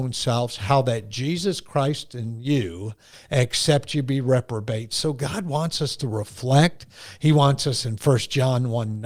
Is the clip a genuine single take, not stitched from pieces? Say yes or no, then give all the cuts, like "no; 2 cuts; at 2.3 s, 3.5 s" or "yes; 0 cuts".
yes; 0 cuts